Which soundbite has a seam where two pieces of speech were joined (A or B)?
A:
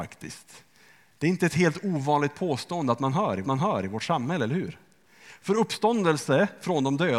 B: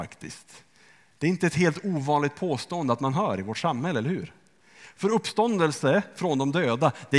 A